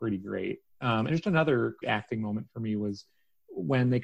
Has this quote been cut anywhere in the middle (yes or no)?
yes